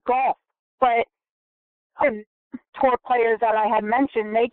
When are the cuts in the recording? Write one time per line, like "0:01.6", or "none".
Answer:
0:02.0
0:02.7